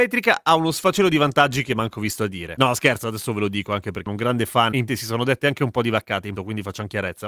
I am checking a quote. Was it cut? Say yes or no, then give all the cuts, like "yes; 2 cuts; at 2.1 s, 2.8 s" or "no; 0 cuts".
yes; 3 cuts; at 4.1 s, 4.9 s, 6.4 s